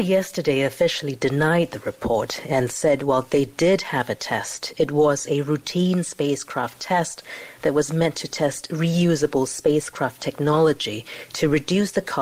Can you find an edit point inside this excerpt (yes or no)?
no